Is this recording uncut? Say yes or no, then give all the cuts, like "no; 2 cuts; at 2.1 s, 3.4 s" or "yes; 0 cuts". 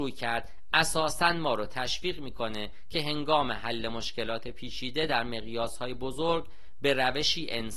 yes; 0 cuts